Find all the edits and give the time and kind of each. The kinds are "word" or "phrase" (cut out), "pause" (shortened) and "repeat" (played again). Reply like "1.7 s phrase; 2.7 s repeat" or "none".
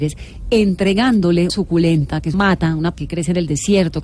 1.5 s word; 2.3 s word; 2.9 s word